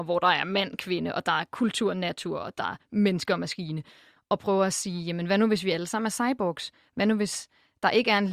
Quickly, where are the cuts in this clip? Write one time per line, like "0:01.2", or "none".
none